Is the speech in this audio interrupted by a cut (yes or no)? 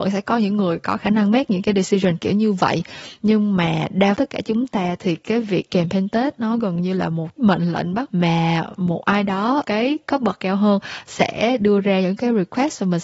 yes